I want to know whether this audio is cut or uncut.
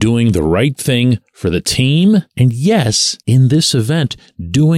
cut